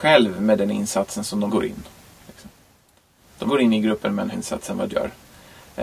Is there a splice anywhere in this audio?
yes; 4 cuts; at 1.5 s, 3.5 s, 4.3 s, 4.9 s

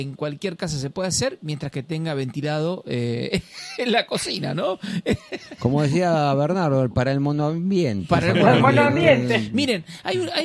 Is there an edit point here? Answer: no; 0 cuts

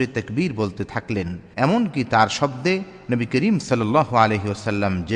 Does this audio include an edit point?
yes; 1 cut; at 1.5 s

